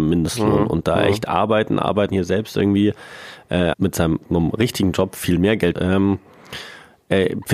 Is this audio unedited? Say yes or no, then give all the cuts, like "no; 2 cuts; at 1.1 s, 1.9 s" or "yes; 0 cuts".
no; 4 cuts; at 2.1 s, 3.7 s, 4.2 s, 5.7 s